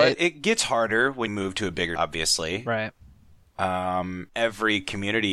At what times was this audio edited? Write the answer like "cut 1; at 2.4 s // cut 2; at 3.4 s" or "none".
cut 1; at 1.3 s // cut 2; at 2.0 s // cut 3; at 4.3 s